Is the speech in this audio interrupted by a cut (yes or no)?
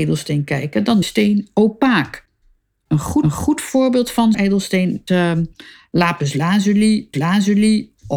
yes